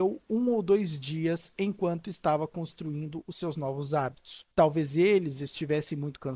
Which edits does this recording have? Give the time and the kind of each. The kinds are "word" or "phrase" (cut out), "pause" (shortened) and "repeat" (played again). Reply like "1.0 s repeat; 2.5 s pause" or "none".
4.5 s pause